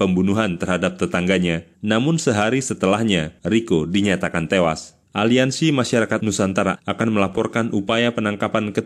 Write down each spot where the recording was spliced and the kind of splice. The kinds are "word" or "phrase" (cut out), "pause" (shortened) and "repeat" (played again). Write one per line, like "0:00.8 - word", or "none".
0:03.4 - pause
0:05.0 - pause
0:06.2 - word
0:06.7 - word